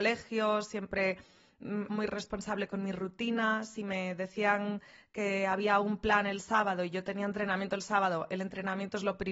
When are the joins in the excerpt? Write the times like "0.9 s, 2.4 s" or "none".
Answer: 1.9 s

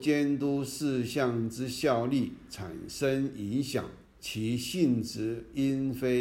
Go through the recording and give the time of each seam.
4.0 s

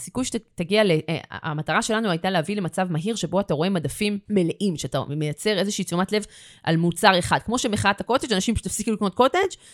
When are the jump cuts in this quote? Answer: none

